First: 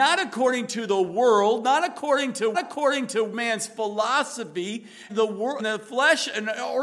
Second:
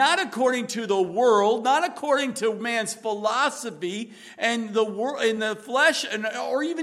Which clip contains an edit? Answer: first; 3 cuts; at 2.5 s, 5.1 s, 5.6 s

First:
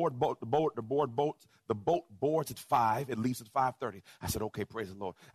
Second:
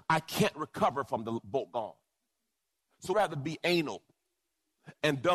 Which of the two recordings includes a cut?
second; 1 cut; at 3.1 s

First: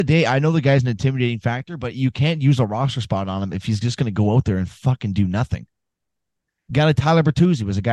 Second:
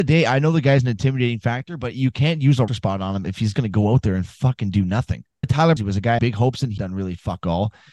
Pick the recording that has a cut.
second; 6 cuts; at 2.7 s, 3.5 s, 5.4 s, 5.8 s, 6.2 s, 6.8 s

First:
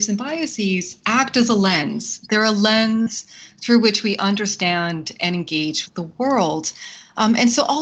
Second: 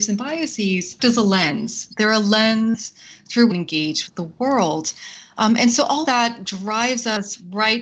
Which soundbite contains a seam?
second; 3 cuts; at 1.0 s, 3.5 s, 6.1 s

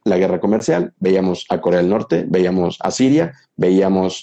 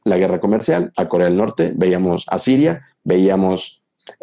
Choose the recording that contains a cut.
second; 1 cut; at 0.9 s

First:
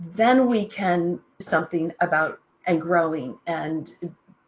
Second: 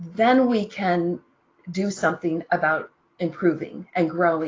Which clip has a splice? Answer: first; 2 cuts; at 1.4 s, 2.6 s

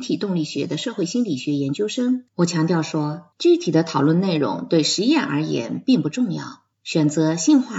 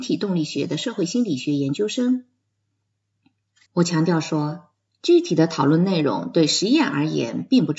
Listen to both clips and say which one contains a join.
first; 3 cuts; at 2.3 s, 3.3 s, 6.7 s

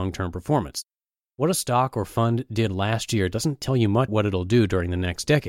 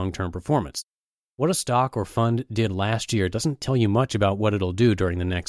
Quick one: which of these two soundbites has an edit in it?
first; 1 cut; at 4.1 s

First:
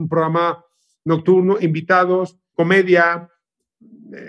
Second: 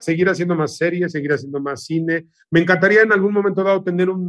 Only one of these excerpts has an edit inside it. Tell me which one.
first; 1 cut; at 2.5 s

